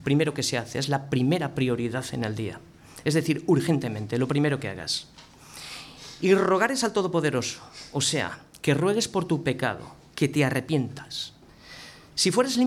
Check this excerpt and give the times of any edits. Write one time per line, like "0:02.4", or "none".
none